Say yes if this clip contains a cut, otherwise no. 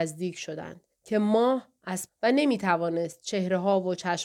yes